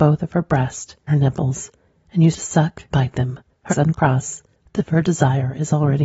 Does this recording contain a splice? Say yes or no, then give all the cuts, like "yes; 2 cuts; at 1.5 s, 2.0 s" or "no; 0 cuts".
yes; 5 cuts; at 1.1 s, 2.3 s, 2.9 s, 3.7 s, 4.8 s